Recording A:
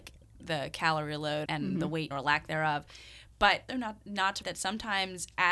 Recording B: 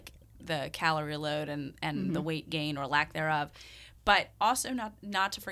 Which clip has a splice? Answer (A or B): A